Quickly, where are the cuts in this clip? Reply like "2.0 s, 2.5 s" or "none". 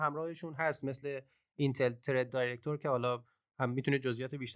none

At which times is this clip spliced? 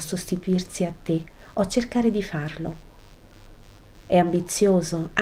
none

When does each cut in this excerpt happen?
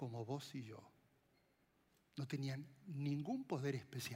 none

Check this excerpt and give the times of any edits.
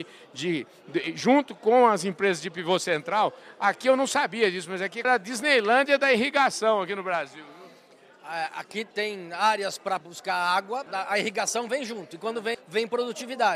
5.0 s, 8.9 s, 10.0 s, 10.9 s, 12.5 s

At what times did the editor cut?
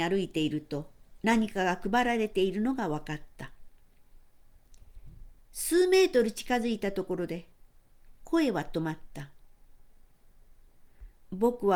1.2 s

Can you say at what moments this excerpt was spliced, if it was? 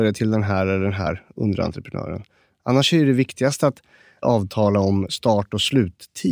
none

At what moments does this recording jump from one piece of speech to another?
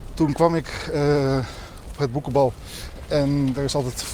1.9 s

